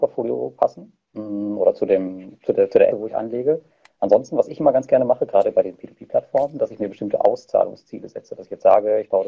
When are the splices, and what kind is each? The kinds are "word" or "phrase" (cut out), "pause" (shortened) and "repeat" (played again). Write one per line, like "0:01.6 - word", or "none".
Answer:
0:02.9 - word